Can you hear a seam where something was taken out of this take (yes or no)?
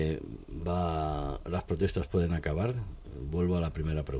no